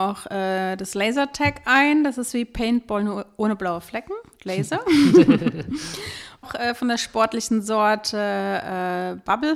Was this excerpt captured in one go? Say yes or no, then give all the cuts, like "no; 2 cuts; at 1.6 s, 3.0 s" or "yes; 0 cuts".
no; 1 cut; at 6.4 s